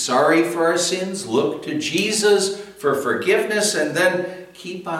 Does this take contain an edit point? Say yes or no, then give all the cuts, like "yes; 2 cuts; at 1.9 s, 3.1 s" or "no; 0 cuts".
no; 0 cuts